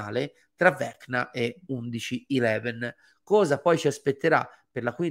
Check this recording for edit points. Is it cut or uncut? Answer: uncut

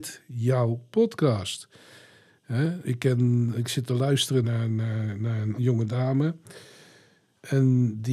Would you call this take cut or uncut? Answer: cut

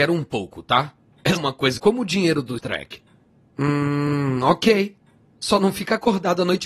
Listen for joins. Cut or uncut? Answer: cut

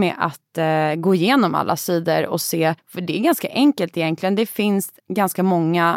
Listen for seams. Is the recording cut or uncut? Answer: cut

